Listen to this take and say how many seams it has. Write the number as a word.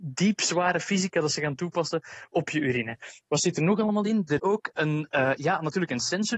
one